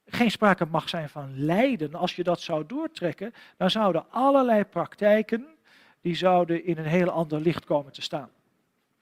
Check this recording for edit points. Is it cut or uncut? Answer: uncut